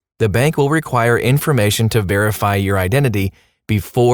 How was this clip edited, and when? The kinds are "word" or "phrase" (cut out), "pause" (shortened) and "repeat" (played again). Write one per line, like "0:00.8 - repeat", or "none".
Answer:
none